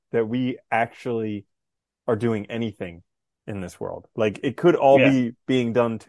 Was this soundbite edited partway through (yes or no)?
no